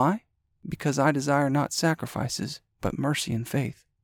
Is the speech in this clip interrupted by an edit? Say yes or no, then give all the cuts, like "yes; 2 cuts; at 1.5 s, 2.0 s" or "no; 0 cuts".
yes; 1 cut; at 2.7 s